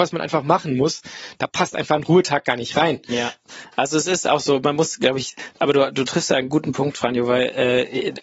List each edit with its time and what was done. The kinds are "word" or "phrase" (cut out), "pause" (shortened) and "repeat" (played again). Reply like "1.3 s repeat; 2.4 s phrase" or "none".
none

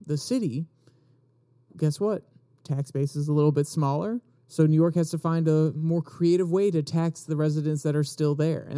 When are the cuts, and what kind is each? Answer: none

